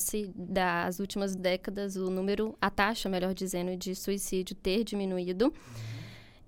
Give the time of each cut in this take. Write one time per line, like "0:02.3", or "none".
0:01.4